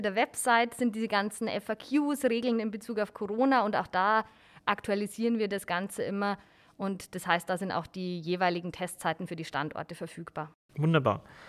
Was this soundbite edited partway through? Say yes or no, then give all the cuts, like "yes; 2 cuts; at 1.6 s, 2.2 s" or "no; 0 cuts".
no; 0 cuts